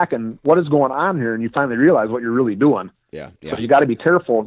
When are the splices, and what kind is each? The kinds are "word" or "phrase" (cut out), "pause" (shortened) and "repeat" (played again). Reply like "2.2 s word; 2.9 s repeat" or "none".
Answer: 3.4 s pause